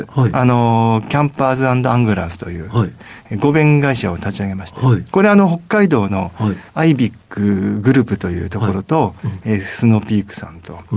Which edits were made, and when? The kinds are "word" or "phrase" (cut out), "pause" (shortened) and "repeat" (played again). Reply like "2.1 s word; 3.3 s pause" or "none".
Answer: 6.7 s pause

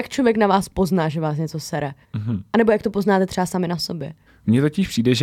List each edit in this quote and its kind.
none

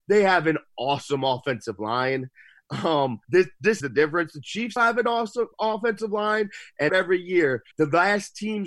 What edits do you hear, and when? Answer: 3.2 s pause; 3.8 s word; 4.8 s word; 5.5 s pause; 6.9 s phrase; 7.7 s pause

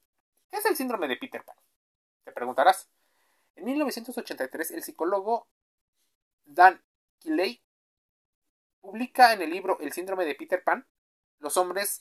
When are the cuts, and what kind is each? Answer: none

